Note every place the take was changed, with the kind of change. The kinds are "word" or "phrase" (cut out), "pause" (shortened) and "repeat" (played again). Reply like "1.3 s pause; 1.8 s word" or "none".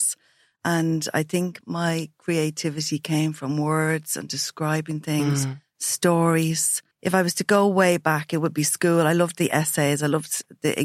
1.6 s word; 6.9 s pause